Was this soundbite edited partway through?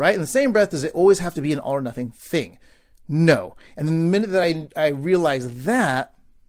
no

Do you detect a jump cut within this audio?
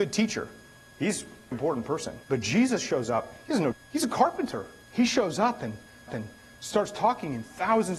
yes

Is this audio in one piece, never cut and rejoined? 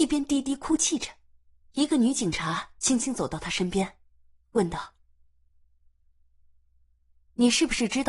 no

